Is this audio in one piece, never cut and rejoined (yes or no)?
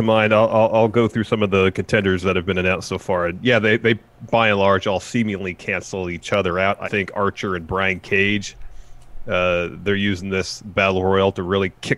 no